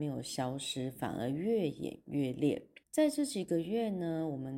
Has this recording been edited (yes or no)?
yes